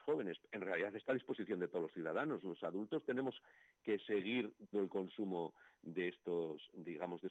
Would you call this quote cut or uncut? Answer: cut